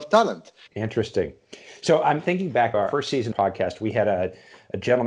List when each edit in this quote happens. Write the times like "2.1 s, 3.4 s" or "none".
2.7 s, 3.3 s